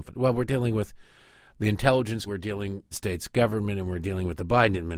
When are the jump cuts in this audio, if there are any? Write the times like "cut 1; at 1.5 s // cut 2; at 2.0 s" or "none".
cut 1; at 2.3 s // cut 2; at 2.9 s